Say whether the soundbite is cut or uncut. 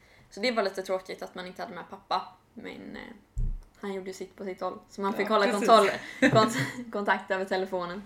uncut